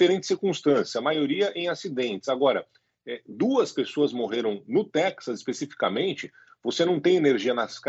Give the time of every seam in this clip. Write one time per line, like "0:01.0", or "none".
none